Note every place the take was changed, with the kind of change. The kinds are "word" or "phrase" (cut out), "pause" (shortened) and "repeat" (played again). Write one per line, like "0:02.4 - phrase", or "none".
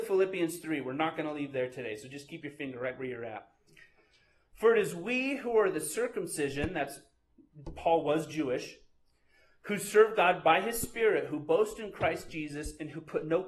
none